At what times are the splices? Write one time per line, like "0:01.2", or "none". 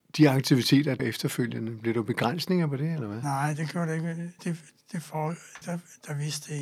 0:01.0
0:04.4
0:04.8
0:05.6